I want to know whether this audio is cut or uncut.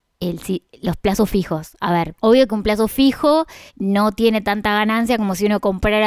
cut